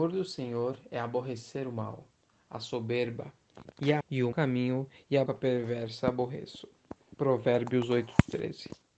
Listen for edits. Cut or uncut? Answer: cut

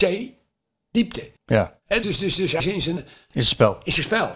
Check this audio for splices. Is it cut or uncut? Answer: cut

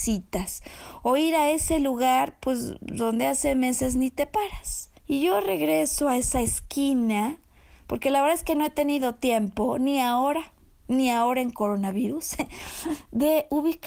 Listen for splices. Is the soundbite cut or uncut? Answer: cut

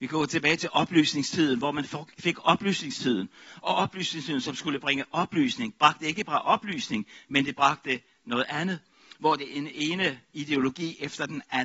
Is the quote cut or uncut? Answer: uncut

